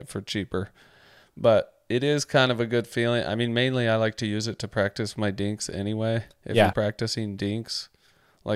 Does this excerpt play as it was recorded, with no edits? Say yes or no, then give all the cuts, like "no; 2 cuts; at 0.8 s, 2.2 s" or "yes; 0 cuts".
no; 1 cut; at 6.7 s